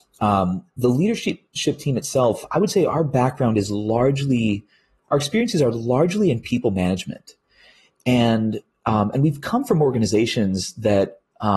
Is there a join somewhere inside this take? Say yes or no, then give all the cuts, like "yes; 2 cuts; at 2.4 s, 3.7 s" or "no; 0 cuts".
no; 0 cuts